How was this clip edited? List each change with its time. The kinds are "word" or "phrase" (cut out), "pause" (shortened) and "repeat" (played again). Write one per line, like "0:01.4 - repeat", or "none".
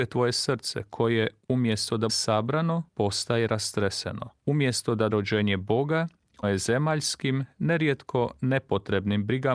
0:02.1 - word
0:02.9 - pause
0:04.4 - pause
0:05.1 - word
0:06.4 - word